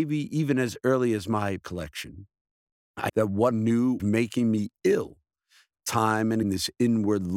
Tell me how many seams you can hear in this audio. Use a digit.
5